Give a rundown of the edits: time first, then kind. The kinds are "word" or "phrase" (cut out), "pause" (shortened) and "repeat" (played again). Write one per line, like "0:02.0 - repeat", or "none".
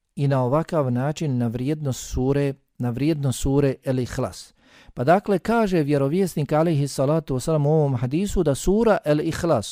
none